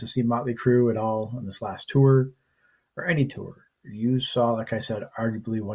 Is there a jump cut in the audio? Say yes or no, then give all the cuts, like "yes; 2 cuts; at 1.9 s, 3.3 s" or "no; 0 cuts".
no; 0 cuts